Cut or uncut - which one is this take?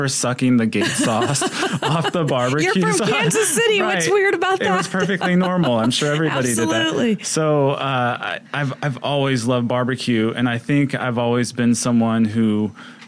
cut